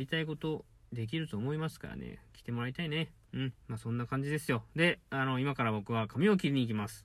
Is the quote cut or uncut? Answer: cut